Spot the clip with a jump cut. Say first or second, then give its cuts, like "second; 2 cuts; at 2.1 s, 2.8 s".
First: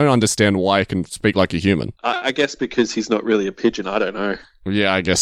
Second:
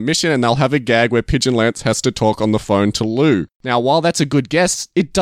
first; 1 cut; at 2.0 s